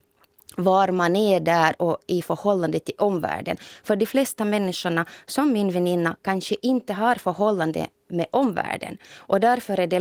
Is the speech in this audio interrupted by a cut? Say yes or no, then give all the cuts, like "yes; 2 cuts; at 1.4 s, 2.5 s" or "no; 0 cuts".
yes; 1 cut; at 1.8 s